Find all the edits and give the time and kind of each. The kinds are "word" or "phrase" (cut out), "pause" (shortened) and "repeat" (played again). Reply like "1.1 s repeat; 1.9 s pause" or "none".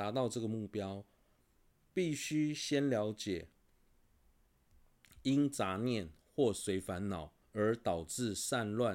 7.4 s pause